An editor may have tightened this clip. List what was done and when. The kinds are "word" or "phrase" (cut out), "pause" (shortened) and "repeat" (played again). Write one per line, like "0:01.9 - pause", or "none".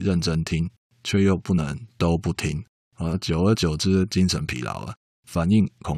none